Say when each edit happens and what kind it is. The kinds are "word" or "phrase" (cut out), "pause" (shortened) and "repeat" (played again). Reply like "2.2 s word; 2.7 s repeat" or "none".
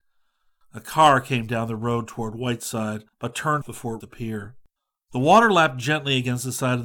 3.1 s pause; 3.6 s word; 4.0 s word; 4.8 s pause